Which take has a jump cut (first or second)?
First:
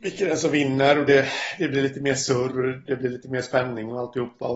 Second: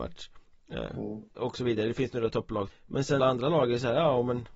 second